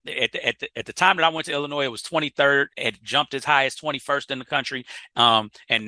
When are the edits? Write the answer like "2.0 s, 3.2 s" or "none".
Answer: 2.7 s